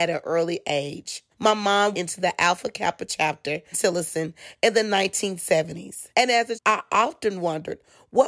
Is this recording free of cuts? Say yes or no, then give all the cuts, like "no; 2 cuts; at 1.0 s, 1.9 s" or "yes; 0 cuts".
no; 5 cuts; at 1.3 s, 1.9 s, 3.7 s, 6.1 s, 6.5 s